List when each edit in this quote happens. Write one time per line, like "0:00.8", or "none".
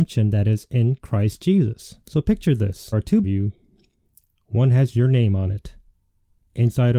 0:02.0
0:02.9
0:03.2